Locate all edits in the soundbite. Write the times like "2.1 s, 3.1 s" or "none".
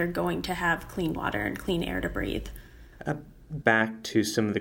1.2 s, 3.6 s